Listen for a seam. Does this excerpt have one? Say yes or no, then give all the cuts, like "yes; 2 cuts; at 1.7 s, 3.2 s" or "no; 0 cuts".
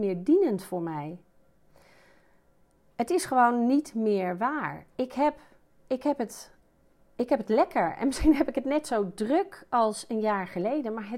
no; 0 cuts